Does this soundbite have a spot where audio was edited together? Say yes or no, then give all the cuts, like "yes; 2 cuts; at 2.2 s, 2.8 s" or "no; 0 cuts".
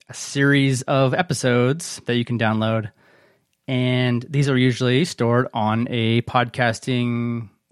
no; 0 cuts